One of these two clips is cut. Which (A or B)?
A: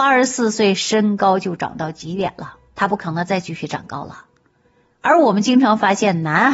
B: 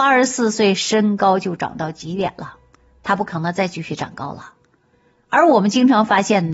A